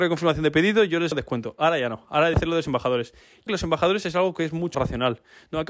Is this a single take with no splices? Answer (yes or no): no